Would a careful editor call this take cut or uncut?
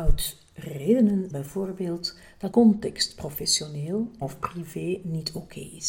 cut